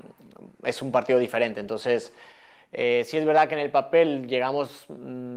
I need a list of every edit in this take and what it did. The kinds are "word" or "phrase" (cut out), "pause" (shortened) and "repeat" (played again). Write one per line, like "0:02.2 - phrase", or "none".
none